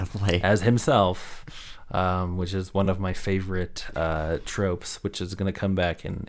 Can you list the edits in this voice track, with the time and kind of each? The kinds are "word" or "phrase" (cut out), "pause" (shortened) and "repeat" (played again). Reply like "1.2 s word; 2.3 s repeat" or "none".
none